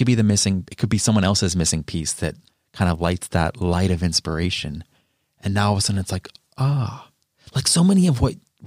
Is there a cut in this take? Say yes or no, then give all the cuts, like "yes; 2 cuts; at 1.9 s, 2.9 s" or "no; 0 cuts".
no; 0 cuts